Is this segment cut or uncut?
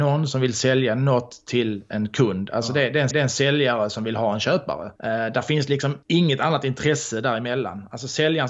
cut